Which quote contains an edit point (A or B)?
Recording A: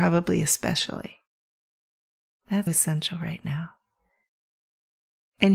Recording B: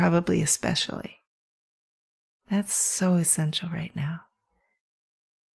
A